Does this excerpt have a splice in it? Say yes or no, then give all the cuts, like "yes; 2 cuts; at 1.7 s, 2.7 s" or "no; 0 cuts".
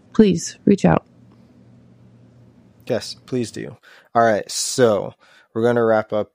no; 0 cuts